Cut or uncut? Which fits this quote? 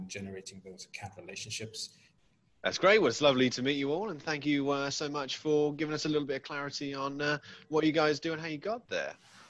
uncut